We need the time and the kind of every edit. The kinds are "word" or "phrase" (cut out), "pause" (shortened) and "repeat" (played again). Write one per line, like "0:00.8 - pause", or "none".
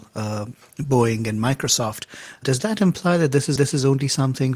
0:03.6 - repeat